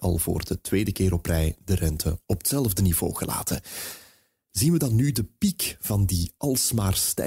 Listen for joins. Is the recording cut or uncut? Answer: uncut